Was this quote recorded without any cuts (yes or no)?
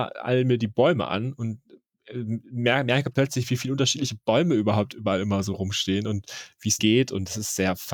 no